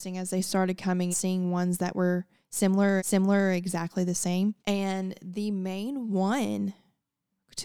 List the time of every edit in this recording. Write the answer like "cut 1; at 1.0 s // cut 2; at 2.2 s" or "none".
cut 1; at 1.1 s // cut 2; at 3.0 s // cut 3; at 4.6 s